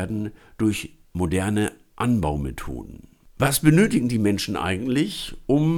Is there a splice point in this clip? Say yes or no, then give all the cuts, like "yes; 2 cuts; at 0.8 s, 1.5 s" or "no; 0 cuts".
no; 0 cuts